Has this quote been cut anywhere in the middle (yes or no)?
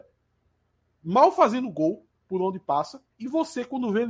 yes